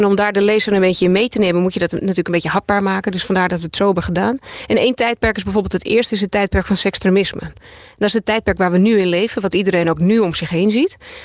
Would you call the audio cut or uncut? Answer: uncut